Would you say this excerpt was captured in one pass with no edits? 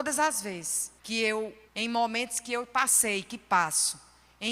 no; 2 cuts; at 1.0 s, 1.7 s

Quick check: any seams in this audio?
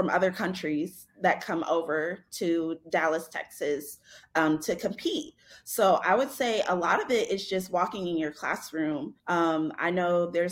yes; 1 cut; at 9.2 s

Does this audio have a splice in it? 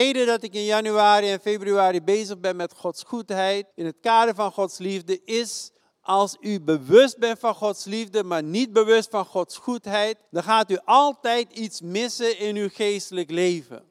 yes; 3 cuts; at 3.7 s, 5.8 s, 10.3 s

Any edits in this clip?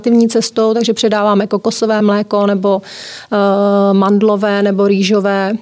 no; 0 cuts

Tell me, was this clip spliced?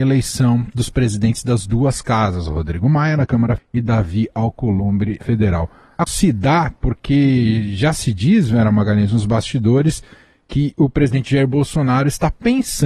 yes; 3 cuts; at 3.6 s, 5.2 s, 6.1 s

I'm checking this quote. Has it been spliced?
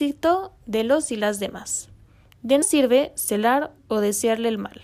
yes; 2 cuts; at 2.6 s, 3.8 s

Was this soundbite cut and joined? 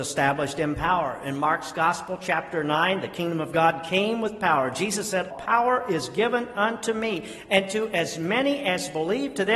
yes; 1 cut; at 5.3 s

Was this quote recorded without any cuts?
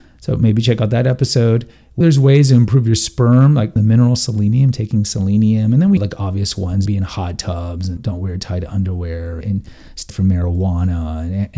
no; 7 cuts; at 2.0 s, 3.8 s, 6.0 s, 6.9 s, 8.0 s, 9.4 s, 10.1 s

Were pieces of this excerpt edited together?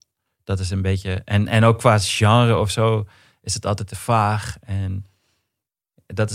no; 0 cuts

